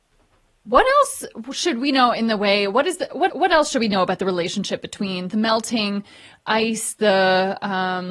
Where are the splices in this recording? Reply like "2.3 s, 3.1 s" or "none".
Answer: 3.3 s